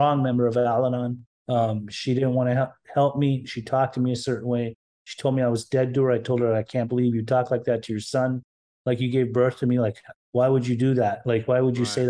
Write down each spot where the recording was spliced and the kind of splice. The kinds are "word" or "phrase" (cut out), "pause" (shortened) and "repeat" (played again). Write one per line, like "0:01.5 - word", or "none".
none